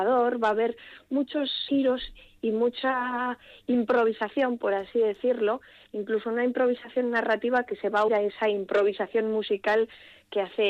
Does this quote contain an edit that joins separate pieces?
yes; 2 cuts; at 1.7 s, 8.1 s

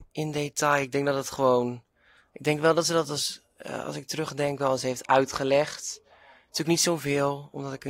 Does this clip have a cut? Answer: no; 0 cuts

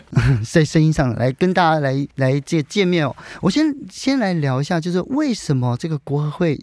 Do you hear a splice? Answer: yes; 1 cut; at 2.1 s

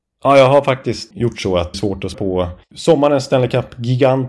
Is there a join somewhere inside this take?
yes; 4 cuts; at 1.1 s, 1.7 s, 2.1 s, 2.6 s

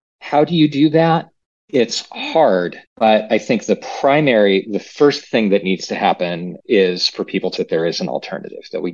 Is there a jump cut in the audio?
yes; 3 cuts; at 2.9 s, 6.6 s, 7.6 s

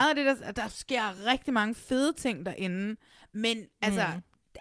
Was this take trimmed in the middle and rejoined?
no; 0 cuts

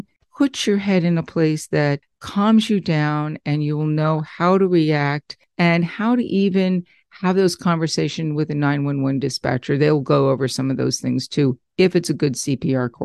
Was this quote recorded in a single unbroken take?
yes; 0 cuts

